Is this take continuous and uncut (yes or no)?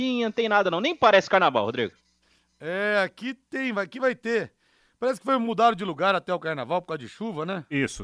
yes